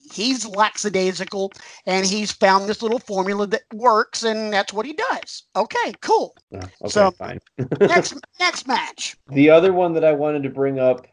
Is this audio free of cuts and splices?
no; 5 cuts; at 3.7 s, 6.4 s, 6.7 s, 8.3 s, 9.2 s

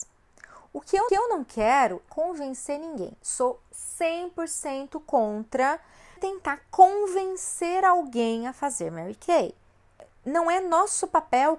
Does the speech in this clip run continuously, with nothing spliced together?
no; 3 cuts; at 1.1 s, 2.1 s, 6.2 s

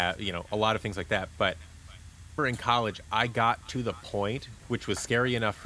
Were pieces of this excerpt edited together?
yes; 1 cut; at 2.4 s

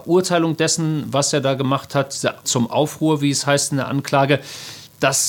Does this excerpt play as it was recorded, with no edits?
no; 1 cut; at 2.4 s

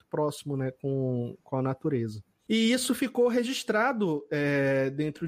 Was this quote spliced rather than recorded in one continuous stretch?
no; 0 cuts

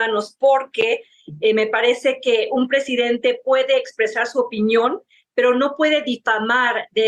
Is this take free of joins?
yes; 0 cuts

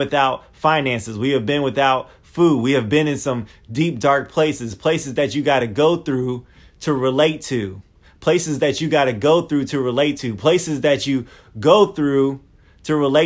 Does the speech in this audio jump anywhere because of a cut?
no; 0 cuts

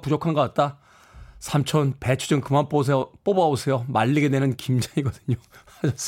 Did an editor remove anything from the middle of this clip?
no; 0 cuts

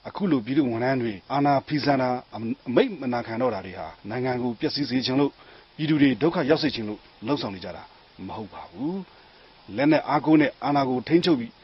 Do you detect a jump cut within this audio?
yes; 2 cuts; at 1.2 s, 4.0 s

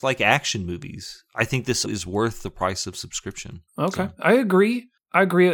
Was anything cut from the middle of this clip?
yes; 2 cuts; at 1.8 s, 3.7 s

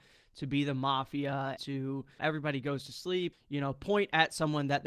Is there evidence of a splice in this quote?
yes; 3 cuts; at 1.6 s, 2.2 s, 3.3 s

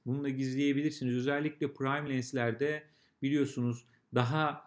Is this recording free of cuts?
yes; 0 cuts

